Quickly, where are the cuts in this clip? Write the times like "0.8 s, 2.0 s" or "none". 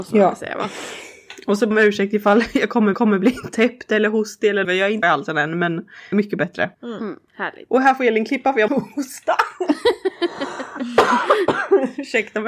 1.7 s, 2.9 s, 4.6 s, 5.0 s, 6.1 s, 6.7 s, 7.3 s, 8.7 s